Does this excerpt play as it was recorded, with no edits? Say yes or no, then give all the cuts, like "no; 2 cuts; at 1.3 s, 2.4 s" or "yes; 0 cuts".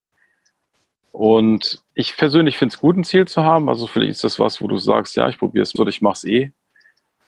no; 2 cuts; at 1.9 s, 5.8 s